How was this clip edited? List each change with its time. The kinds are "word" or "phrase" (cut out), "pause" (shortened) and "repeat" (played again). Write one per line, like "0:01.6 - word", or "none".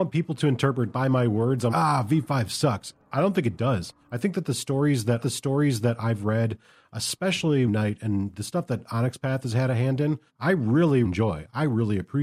0:00.9 - word
0:01.7 - word
0:04.0 - pause
0:05.2 - repeat
0:07.7 - phrase
0:10.3 - pause
0:11.0 - word